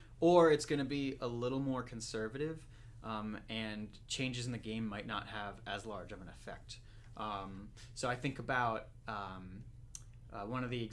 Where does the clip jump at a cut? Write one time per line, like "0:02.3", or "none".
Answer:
none